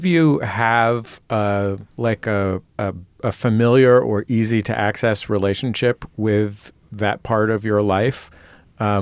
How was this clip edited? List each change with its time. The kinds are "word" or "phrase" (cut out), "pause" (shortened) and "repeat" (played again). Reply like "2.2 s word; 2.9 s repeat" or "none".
1.9 s pause; 2.7 s pause